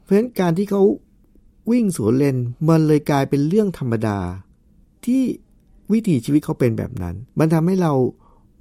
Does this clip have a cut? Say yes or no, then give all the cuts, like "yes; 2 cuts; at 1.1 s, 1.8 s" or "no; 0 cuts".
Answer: yes; 1 cut; at 7.3 s